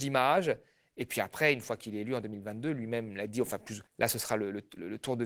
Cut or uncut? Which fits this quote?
cut